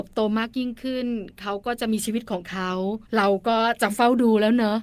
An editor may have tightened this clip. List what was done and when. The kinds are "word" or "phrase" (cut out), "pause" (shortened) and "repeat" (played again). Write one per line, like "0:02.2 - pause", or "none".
0:03.1 - pause